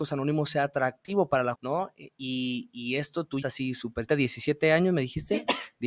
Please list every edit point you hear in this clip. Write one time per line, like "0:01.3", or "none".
0:01.6
0:03.4
0:04.1